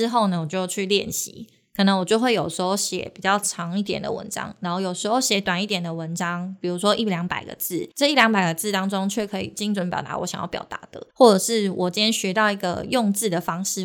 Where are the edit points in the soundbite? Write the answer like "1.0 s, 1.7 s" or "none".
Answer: 7.9 s, 11.1 s